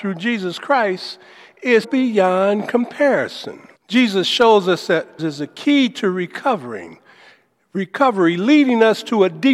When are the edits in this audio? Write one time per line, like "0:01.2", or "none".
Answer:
0:01.8
0:03.8
0:05.2